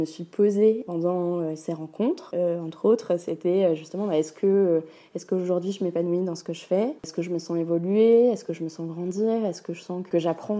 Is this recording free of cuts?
yes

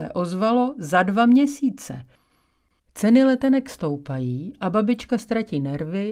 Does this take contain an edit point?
no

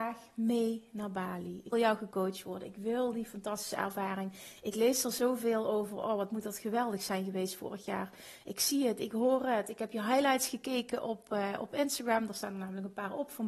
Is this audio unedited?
no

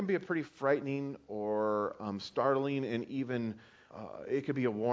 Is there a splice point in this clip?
yes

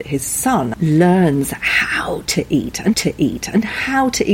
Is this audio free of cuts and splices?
no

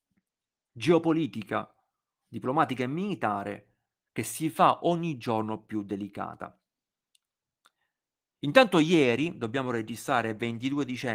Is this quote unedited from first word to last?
yes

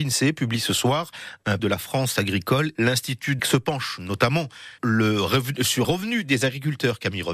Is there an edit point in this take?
yes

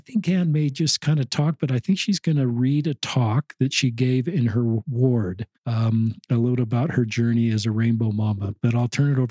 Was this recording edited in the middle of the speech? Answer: yes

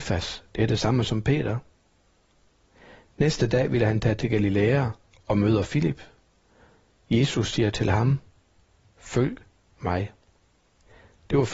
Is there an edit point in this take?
no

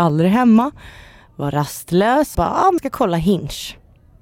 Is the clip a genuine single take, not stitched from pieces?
no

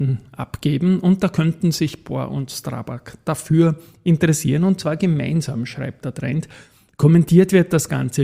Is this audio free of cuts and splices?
yes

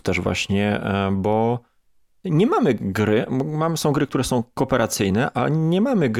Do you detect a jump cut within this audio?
no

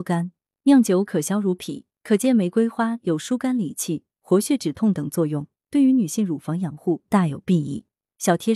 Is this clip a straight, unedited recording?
no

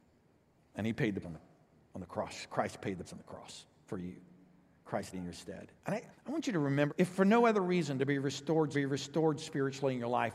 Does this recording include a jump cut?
yes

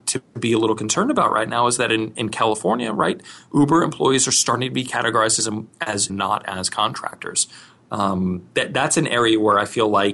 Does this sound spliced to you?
yes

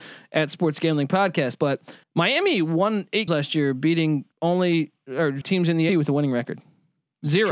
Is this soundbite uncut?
no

